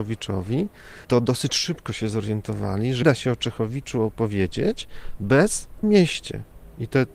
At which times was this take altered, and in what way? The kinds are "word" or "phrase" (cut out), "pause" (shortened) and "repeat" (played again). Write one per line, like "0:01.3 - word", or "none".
0:01.0 - pause
0:03.0 - word
0:05.8 - phrase